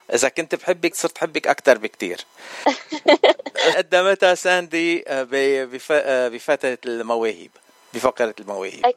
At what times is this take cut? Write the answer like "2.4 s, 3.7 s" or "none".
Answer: 0.9 s, 3.7 s